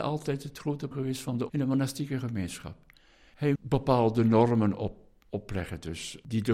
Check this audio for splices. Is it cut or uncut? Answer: cut